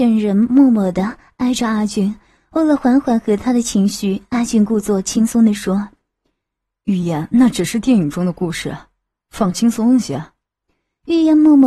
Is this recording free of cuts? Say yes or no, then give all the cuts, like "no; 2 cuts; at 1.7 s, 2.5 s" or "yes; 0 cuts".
yes; 0 cuts